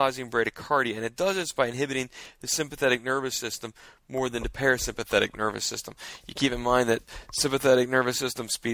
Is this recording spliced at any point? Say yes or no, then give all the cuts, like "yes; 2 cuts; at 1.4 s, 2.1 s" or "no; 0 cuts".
no; 0 cuts